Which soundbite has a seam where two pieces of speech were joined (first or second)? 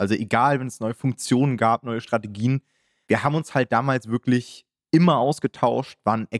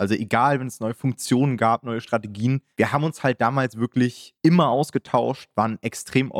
second